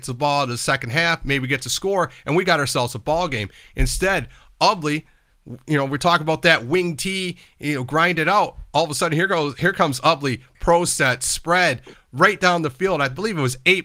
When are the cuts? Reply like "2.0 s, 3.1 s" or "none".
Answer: none